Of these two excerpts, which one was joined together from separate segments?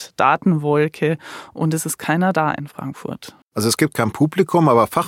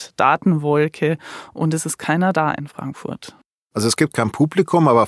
first; 1 cut; at 3.4 s

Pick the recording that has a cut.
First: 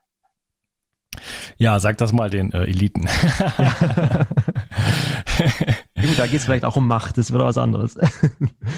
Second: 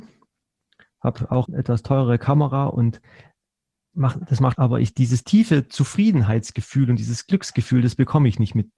second; 2 cuts; at 1.4 s, 4.5 s

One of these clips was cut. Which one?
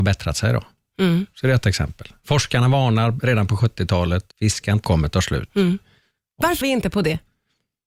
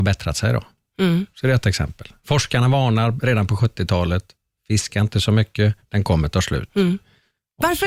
first; 3 cuts; at 4.3 s, 4.8 s, 6.6 s

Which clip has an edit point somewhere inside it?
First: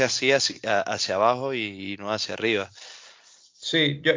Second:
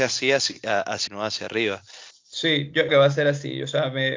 second; 3 cuts; at 1.1 s, 2.1 s, 2.9 s

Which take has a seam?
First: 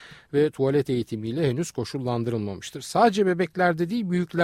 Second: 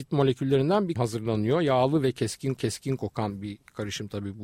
second; 2 cuts; at 1.0 s, 2.6 s

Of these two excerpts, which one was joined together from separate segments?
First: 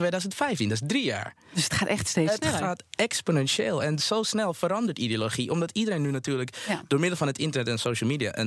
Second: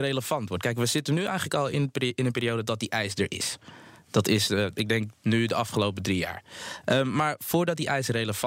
first; 1 cut; at 1.4 s

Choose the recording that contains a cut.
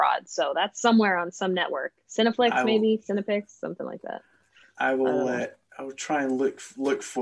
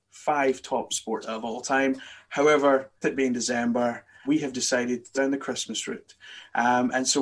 second; 4 cuts; at 1.2 s, 3.0 s, 4.2 s, 5.1 s

